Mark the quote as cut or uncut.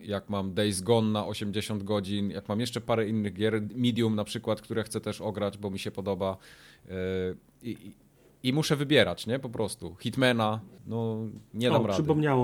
cut